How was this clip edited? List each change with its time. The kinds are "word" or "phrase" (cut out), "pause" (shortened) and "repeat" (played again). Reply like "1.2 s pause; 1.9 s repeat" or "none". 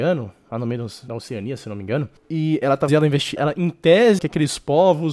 1.1 s word; 2.2 s pause; 2.9 s phrase; 3.4 s word; 4.2 s word